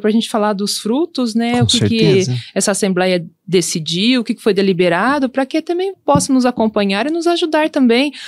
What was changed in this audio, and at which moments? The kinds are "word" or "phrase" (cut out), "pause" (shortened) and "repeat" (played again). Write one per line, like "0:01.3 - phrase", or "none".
0:05.9 - word